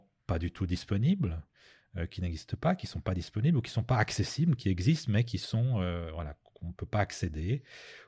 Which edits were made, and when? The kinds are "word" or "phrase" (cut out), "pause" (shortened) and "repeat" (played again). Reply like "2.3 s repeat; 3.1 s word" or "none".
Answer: none

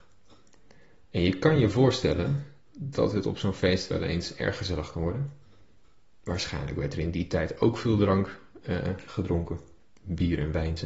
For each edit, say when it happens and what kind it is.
none

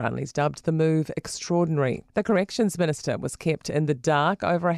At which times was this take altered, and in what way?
2.1 s pause

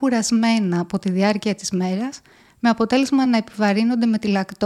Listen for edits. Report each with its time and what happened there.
none

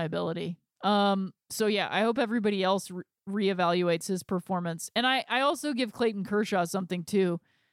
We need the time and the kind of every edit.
1.4 s pause

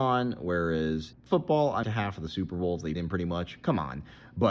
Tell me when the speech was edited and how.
1.1 s word; 1.8 s phrase; 3.0 s word

